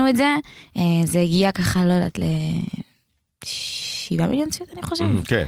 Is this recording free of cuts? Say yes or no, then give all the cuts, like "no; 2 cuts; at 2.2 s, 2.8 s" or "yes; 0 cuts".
yes; 0 cuts